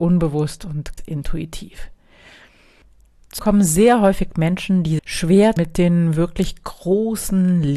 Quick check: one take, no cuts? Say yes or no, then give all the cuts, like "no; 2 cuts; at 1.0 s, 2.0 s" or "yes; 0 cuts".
no; 4 cuts; at 1.0 s, 3.4 s, 5.0 s, 5.6 s